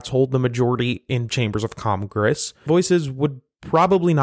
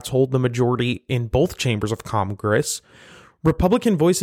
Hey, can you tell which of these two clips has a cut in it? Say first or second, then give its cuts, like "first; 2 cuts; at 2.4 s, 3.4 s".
first; 2 cuts; at 1.3 s, 2.7 s